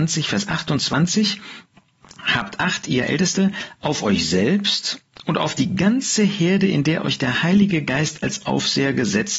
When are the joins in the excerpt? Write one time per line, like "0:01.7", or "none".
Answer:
none